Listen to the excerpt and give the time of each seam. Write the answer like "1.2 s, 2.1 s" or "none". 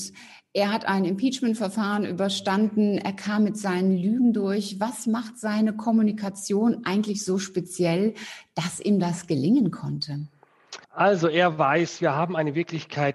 10.8 s